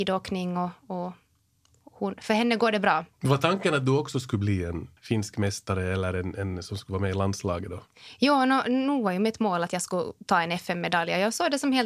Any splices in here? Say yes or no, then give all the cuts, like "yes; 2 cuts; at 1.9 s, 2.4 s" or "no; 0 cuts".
yes; 1 cut; at 3.1 s